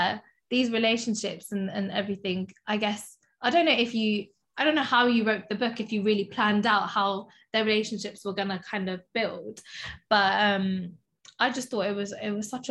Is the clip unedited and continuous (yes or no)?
yes